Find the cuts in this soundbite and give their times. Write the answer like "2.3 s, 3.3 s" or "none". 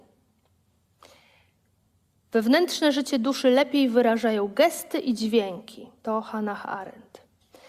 6.0 s